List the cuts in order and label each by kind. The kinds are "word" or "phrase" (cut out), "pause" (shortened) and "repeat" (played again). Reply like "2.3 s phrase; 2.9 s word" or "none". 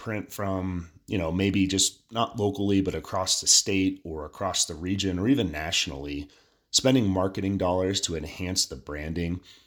none